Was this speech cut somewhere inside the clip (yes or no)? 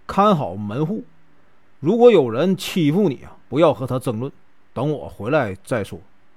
yes